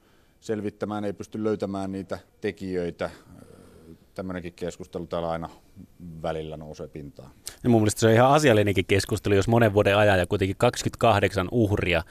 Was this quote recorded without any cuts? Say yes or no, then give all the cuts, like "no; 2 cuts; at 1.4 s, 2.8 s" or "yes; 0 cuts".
no; 1 cut; at 2.3 s